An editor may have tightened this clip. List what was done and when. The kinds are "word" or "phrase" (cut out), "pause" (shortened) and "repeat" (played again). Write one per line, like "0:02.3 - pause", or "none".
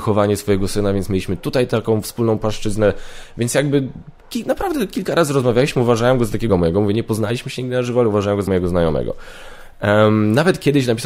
0:06.5 - word
0:08.5 - word